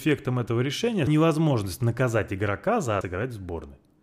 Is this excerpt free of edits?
no; 2 cuts; at 1.1 s, 3.0 s

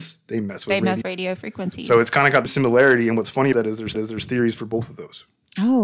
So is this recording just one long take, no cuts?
no; 4 cuts; at 1.0 s, 2.5 s, 3.5 s, 3.9 s

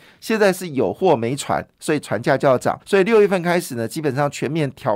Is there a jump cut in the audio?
yes; 1 cut; at 2.8 s

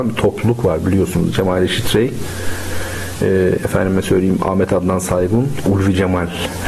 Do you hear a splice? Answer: no; 0 cuts

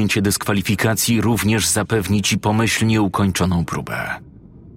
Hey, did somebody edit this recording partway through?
no; 0 cuts

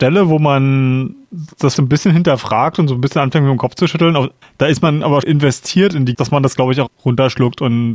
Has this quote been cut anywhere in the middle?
yes; 5 cuts; at 1.7 s, 4.4 s, 5.2 s, 6.1 s, 6.9 s

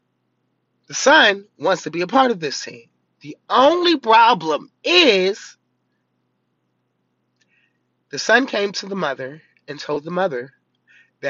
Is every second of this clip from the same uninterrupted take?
yes; 0 cuts

